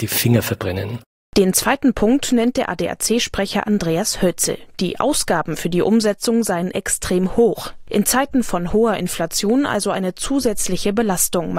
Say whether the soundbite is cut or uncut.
uncut